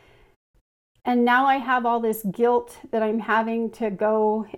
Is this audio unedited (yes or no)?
yes